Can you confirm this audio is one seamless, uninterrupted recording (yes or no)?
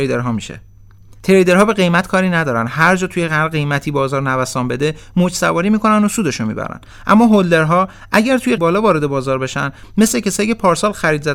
no